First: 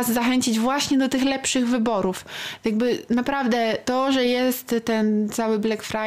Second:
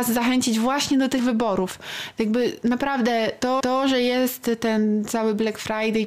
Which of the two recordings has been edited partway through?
second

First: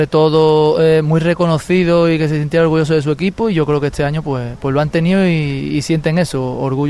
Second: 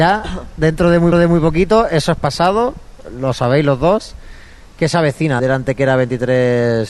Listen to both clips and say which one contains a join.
second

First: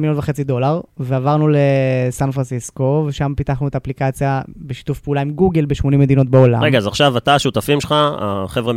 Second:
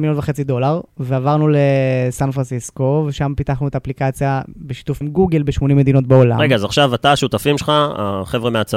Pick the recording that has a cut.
second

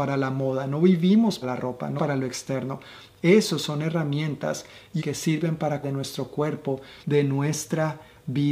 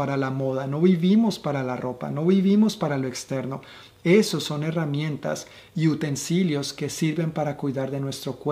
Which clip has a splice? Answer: first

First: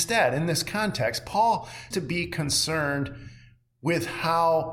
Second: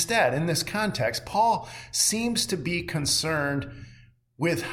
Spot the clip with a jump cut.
first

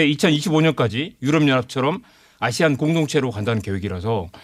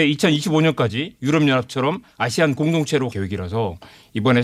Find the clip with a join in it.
second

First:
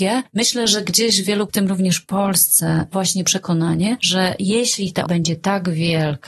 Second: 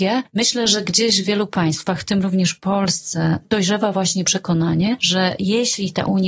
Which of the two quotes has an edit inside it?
first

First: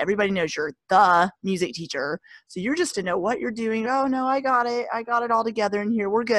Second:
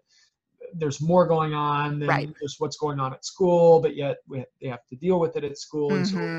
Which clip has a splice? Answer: first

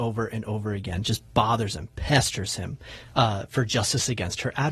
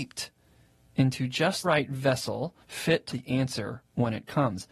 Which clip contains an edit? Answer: second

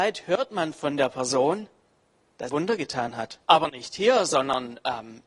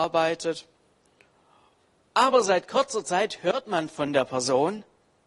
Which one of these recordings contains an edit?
first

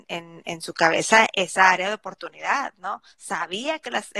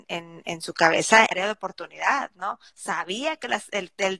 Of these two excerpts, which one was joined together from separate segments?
second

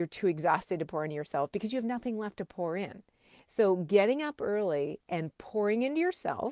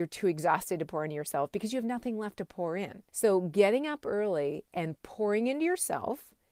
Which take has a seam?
second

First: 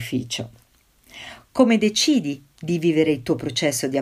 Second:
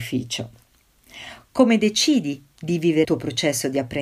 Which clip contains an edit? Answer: second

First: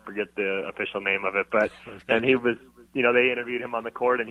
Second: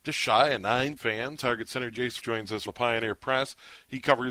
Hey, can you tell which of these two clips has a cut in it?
second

